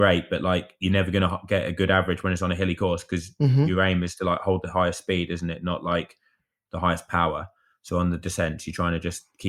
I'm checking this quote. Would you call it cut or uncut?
uncut